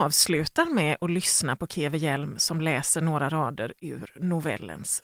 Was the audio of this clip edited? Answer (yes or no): no